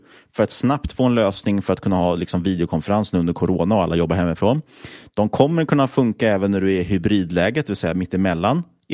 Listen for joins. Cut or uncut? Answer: uncut